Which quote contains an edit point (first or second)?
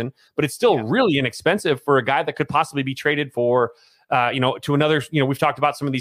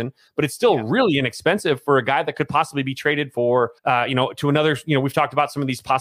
second